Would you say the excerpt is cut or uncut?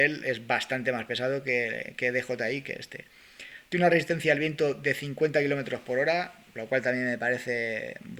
uncut